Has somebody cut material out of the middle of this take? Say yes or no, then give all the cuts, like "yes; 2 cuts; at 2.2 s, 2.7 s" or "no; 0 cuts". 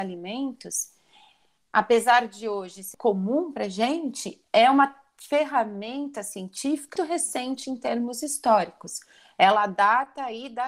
yes; 2 cuts; at 2.9 s, 7.0 s